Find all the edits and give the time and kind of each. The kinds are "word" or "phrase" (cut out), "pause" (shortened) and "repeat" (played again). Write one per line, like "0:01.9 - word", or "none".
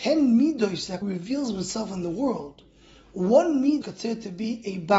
0:01.0 - word
0:03.8 - word